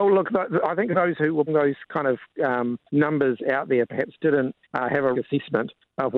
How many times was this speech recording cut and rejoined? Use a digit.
4